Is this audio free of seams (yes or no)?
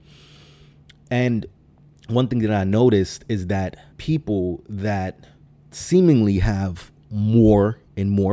no